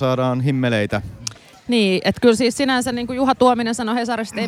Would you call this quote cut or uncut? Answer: uncut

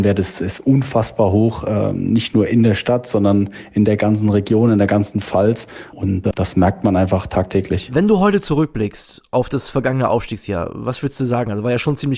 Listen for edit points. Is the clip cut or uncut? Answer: uncut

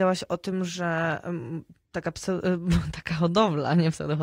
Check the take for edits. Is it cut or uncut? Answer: uncut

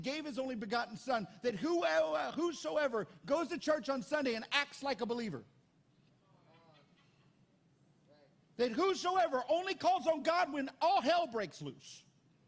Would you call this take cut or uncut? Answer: uncut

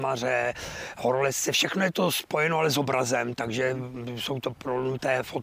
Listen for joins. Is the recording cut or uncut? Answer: uncut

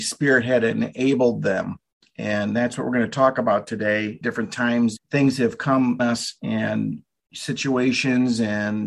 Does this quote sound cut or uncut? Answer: cut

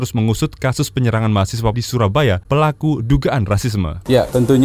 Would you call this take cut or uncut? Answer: cut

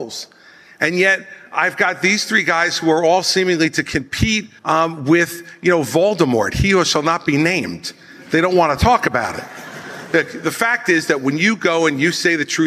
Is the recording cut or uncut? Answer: cut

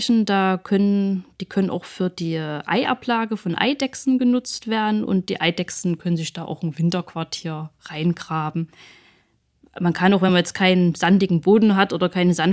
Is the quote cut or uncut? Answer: uncut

